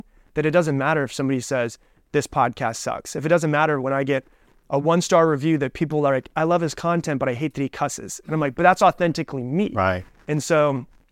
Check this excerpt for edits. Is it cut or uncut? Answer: uncut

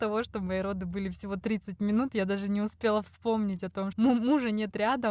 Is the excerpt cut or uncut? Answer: cut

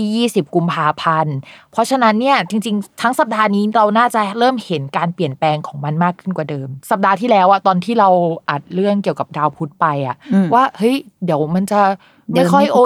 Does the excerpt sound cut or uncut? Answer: cut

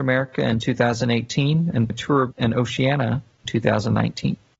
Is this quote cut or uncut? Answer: cut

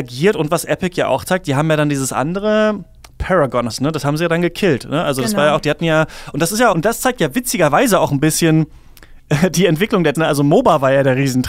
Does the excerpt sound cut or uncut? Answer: cut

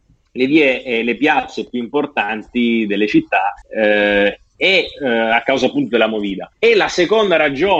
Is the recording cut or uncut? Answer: cut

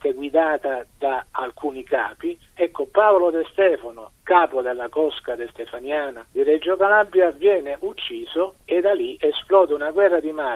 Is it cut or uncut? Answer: uncut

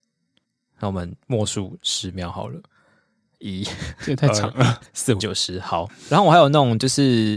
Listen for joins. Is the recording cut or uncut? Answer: cut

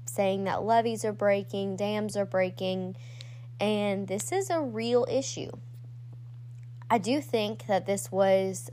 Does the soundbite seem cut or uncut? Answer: uncut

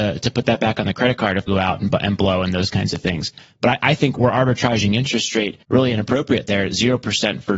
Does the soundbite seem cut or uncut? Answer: cut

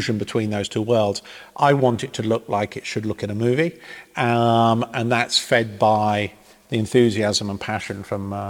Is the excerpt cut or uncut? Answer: uncut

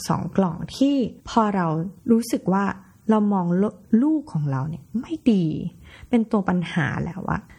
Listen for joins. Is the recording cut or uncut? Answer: cut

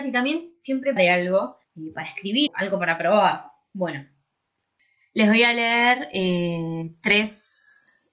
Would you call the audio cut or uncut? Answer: cut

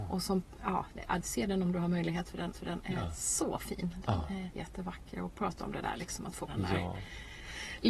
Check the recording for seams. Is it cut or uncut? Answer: cut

